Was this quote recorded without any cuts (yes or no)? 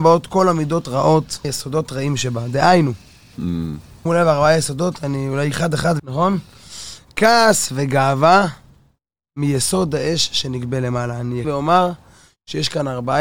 no